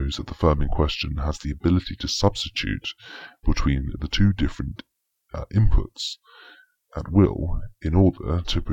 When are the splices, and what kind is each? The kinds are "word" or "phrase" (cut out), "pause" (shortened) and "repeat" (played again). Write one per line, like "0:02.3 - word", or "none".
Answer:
none